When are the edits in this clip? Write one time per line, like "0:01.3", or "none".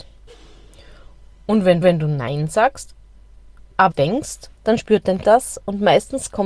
0:01.8
0:03.9
0:04.5
0:05.2